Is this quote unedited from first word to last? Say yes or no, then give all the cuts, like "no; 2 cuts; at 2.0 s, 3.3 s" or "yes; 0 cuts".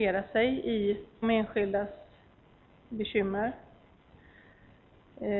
no; 1 cut; at 1.2 s